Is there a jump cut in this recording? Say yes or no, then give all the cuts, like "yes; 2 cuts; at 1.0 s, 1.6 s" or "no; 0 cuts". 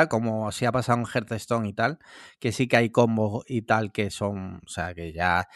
no; 0 cuts